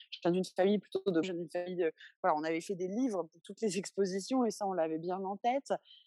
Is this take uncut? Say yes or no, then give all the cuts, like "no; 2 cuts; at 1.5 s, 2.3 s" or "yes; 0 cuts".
no; 1 cut; at 1.2 s